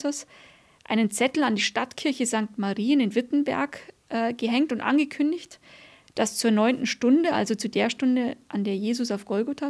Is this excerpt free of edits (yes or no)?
yes